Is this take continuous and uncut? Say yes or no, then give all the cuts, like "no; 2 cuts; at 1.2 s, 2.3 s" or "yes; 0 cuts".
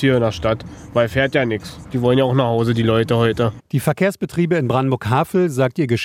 yes; 0 cuts